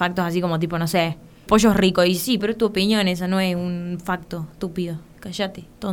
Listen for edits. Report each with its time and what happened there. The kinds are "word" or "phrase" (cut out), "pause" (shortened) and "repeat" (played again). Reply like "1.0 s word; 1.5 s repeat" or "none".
1.5 s word; 2.4 s word